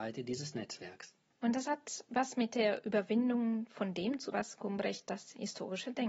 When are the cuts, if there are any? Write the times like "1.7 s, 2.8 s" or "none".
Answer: 4.3 s